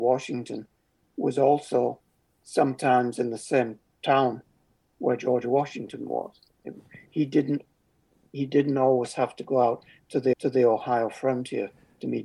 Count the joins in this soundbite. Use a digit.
1